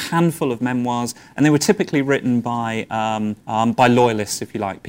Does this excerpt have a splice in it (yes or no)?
yes